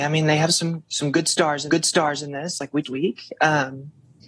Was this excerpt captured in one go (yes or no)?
no